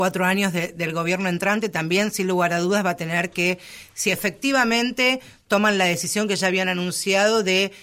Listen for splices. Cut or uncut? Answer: uncut